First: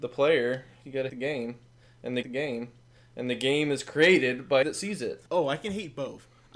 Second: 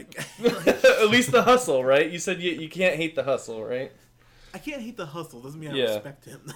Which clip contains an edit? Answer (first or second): first